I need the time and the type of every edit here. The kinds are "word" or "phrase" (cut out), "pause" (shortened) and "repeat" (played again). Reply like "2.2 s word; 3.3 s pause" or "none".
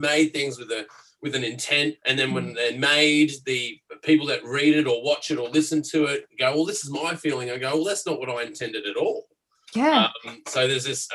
2.0 s pause